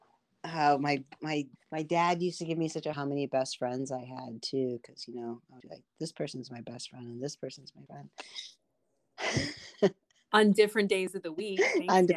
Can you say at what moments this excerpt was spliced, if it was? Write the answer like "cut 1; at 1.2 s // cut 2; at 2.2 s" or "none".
cut 1; at 1.6 s // cut 2; at 2.9 s // cut 3; at 5.6 s // cut 4; at 7.9 s